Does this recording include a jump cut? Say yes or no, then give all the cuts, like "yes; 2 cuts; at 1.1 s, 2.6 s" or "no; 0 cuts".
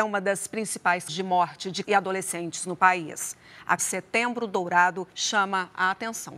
yes; 4 cuts; at 1.1 s, 1.8 s, 3.8 s, 5.1 s